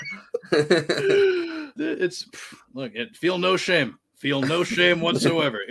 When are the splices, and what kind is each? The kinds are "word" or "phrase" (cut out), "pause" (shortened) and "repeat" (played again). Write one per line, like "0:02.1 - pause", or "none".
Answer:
0:01.8 - word